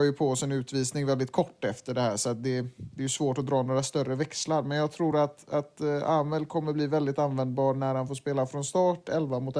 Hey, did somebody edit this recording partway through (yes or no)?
no